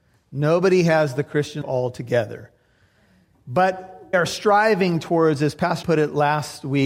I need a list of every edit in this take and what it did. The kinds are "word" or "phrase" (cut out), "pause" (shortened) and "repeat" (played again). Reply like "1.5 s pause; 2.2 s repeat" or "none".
1.6 s word; 4.1 s word; 5.8 s word